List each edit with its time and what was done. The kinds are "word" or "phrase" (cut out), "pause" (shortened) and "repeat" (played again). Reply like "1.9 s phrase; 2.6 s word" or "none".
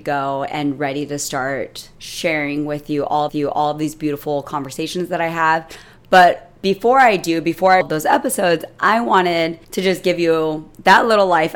1.9 s pause; 3.3 s repeat; 7.8 s phrase; 9.6 s pause